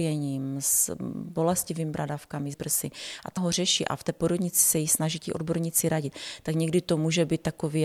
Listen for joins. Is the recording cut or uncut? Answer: cut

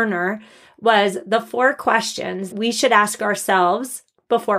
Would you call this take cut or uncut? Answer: cut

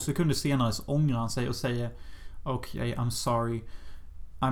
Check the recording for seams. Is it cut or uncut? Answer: uncut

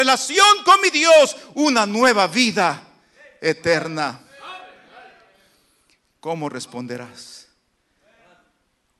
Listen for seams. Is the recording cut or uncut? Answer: uncut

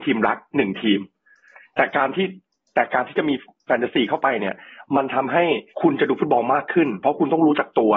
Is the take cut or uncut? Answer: cut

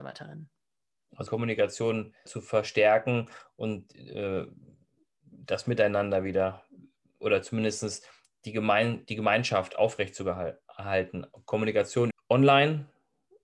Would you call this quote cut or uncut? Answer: cut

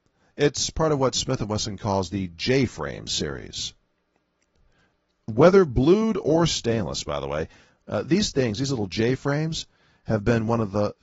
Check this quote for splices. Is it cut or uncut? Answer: uncut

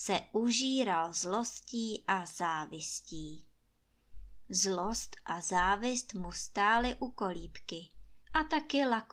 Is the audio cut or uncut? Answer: cut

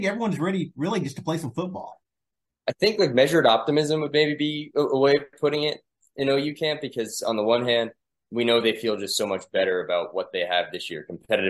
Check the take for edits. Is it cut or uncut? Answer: uncut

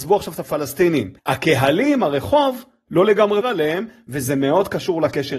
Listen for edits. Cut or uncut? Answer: cut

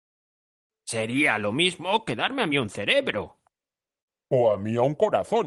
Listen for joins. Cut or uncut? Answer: uncut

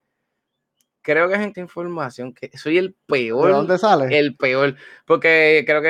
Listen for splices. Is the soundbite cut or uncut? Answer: cut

